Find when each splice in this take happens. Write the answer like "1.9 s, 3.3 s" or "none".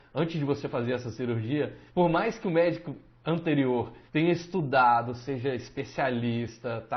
1.9 s, 4.1 s